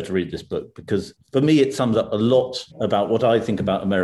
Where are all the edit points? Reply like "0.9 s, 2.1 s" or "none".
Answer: 1.2 s, 2.7 s

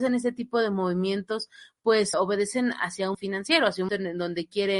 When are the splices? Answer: 2.1 s, 3.1 s, 3.9 s

